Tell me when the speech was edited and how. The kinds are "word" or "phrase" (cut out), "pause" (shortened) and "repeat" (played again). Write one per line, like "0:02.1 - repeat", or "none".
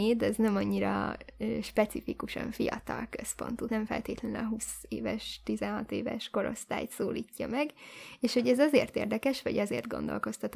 0:03.7 - word